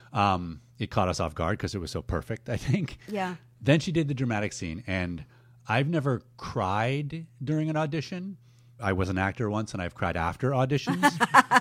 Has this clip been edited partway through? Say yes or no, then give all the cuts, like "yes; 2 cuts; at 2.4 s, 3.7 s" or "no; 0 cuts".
yes; 1 cut; at 8.8 s